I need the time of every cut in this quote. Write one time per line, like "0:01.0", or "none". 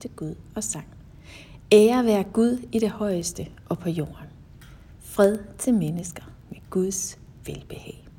none